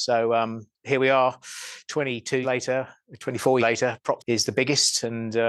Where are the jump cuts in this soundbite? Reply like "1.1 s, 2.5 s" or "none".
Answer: 2.4 s, 3.6 s, 4.2 s